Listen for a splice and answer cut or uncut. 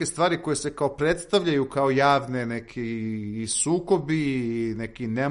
uncut